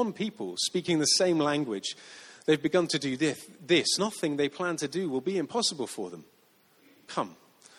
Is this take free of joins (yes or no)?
no